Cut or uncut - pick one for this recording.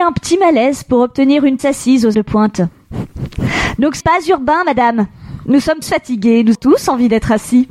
cut